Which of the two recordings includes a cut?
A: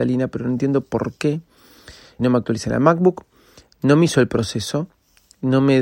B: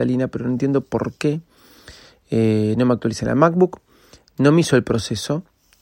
A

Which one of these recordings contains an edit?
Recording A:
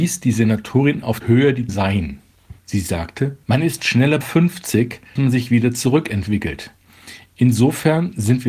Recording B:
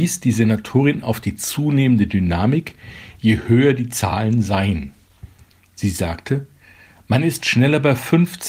A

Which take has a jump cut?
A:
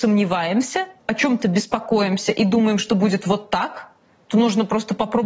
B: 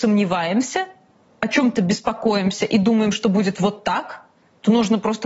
A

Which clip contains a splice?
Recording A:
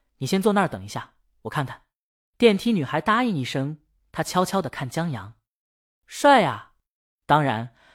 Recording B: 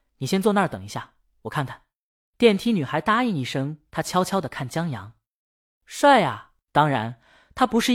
B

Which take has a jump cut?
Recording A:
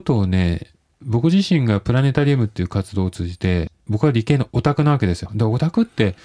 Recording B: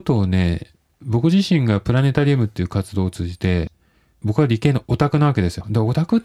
A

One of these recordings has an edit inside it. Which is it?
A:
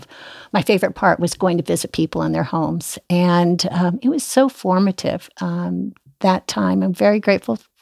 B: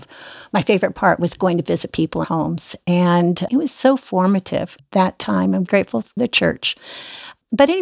B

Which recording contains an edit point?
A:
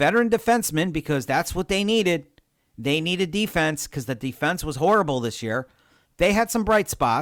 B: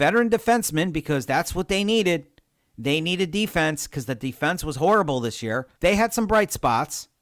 B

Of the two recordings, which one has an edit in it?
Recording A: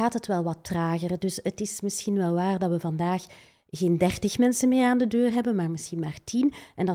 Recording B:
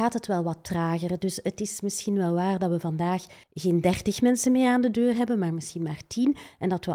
B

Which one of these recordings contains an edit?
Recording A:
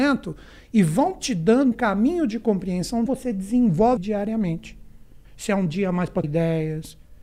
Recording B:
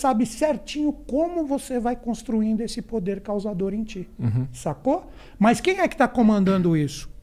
A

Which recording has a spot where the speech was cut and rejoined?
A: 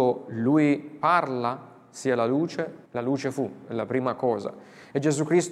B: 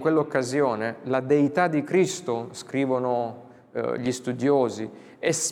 A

